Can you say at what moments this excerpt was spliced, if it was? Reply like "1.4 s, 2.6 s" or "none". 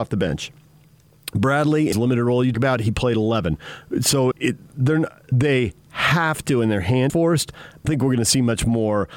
1.9 s, 2.5 s, 4.3 s, 5.3 s, 7.1 s, 7.8 s